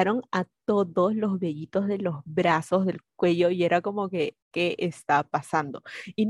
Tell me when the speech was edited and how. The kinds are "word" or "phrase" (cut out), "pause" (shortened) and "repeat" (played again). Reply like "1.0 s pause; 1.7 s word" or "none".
4.4 s pause